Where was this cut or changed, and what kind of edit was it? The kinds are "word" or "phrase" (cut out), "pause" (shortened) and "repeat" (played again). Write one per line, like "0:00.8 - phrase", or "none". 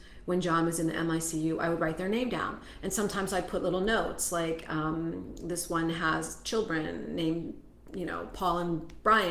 none

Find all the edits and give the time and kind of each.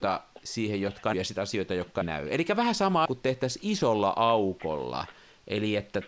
0:01.1 - word
0:02.0 - word
0:03.1 - word

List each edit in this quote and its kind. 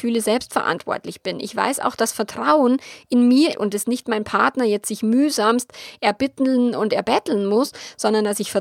0:03.5 - word

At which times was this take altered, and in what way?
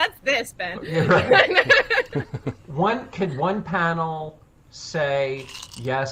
none

